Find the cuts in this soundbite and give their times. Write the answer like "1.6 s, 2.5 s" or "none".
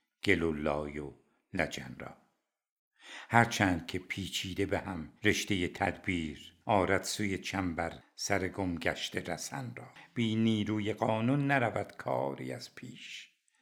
5.2 s, 6.6 s, 9.9 s